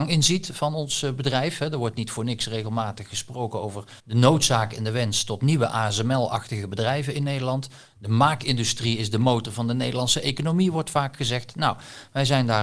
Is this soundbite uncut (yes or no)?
no